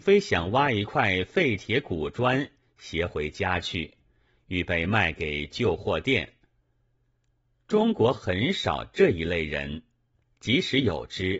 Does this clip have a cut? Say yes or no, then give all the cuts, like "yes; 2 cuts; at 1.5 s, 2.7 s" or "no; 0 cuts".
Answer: no; 0 cuts